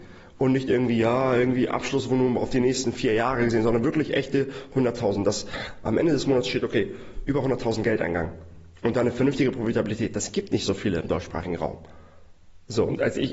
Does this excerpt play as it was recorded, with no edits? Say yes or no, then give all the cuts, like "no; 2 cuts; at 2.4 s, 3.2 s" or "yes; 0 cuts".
yes; 0 cuts